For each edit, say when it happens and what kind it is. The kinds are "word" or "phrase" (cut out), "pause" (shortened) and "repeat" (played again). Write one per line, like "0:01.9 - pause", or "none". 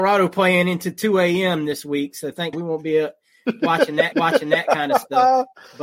0:02.5 - word
0:04.1 - repeat